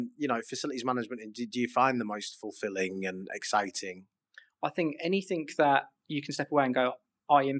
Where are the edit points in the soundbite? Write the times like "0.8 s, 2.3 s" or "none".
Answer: none